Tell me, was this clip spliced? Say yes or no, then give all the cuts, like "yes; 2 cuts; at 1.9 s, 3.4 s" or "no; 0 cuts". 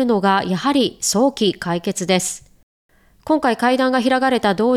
no; 0 cuts